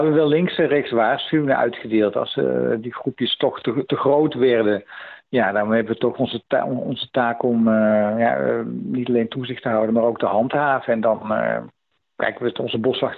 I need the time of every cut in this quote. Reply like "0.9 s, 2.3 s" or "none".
none